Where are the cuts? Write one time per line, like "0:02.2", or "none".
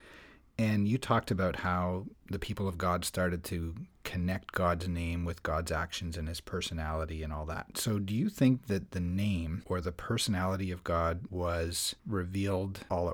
none